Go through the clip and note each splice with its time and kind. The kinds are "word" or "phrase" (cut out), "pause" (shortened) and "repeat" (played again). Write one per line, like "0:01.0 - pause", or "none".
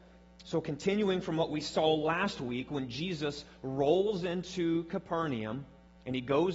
none